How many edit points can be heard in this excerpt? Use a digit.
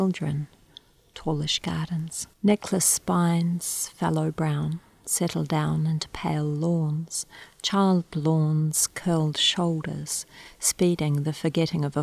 1